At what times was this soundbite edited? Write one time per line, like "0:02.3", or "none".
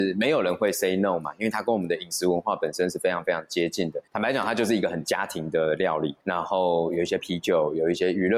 0:04.1
0:06.2